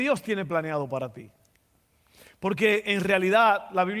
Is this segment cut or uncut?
uncut